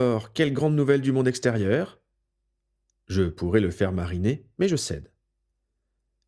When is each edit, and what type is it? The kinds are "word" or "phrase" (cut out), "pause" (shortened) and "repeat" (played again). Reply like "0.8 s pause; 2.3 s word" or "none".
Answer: none